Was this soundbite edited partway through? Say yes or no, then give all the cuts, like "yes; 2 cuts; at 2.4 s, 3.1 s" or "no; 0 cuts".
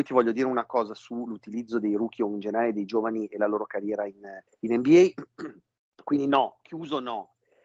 yes; 2 cuts; at 4.5 s, 5.8 s